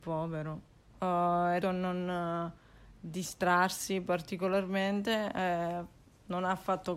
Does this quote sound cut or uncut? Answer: cut